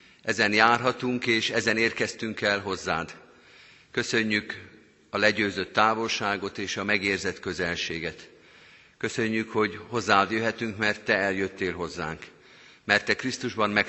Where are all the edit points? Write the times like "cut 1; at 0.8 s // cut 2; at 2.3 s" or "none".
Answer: none